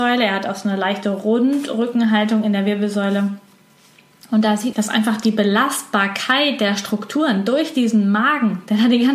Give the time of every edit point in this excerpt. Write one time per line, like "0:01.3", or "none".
0:04.7

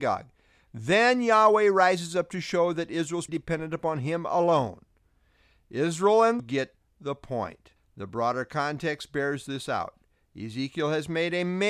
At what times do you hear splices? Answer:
0:03.3
0:06.4
0:07.8

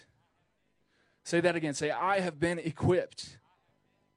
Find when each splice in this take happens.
none

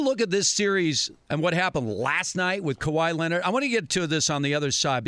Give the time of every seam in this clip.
none

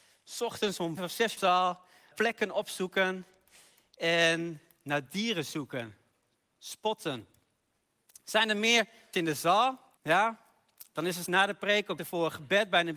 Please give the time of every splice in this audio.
0:01.0
0:01.4
0:02.1
0:09.1
0:10.0
0:11.3
0:12.0

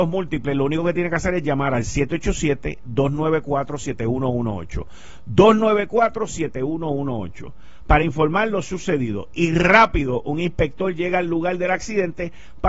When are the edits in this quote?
none

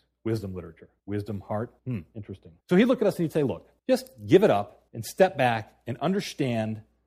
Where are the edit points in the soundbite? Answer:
0:01.0
0:01.8
0:02.6
0:03.8
0:04.9

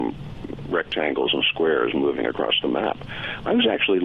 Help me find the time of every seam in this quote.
none

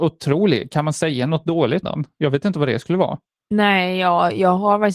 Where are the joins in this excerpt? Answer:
0:01.8

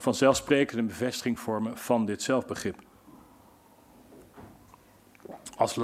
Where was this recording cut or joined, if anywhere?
none

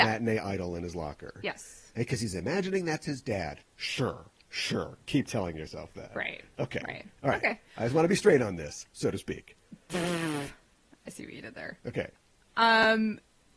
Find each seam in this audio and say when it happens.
none

